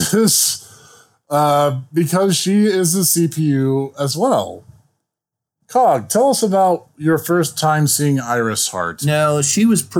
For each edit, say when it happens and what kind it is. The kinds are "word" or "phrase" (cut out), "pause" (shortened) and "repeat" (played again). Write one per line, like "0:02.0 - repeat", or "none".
none